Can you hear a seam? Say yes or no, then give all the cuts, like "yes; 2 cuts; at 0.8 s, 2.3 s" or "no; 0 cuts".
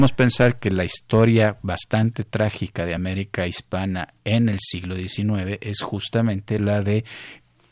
no; 0 cuts